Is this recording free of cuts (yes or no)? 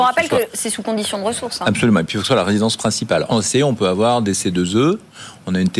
no